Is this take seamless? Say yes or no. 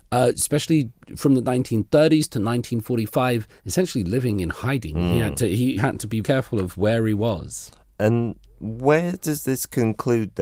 no